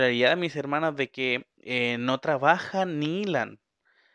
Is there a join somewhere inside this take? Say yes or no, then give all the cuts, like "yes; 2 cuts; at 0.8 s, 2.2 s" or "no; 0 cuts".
no; 0 cuts